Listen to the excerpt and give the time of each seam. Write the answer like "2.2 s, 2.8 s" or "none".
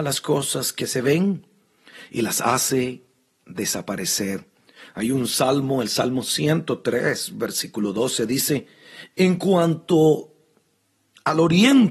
none